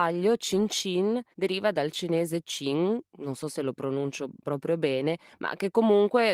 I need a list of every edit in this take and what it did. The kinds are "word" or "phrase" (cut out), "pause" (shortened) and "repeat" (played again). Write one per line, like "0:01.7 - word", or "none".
0:01.3 - pause